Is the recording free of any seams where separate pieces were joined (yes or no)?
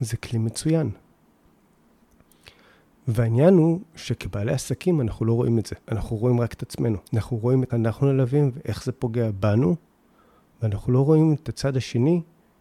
no